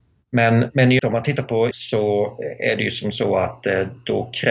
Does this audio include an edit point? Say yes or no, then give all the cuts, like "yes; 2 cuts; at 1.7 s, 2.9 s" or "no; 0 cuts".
yes; 2 cuts; at 1.0 s, 1.7 s